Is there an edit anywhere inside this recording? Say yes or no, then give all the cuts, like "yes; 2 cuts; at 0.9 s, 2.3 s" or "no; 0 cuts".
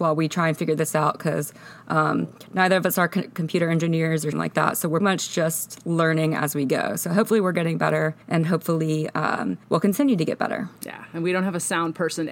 yes; 5 cuts; at 4.3 s, 5.0 s, 8.2 s, 9.6 s, 10.8 s